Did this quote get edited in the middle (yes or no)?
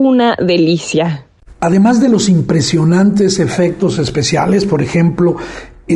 no